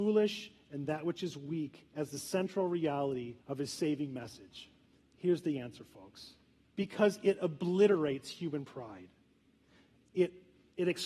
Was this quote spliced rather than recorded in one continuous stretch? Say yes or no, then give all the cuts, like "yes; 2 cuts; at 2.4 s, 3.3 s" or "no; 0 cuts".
yes; 3 cuts; at 3.4 s, 4.8 s, 6.6 s